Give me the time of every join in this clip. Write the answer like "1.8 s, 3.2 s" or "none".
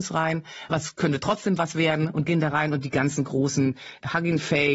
none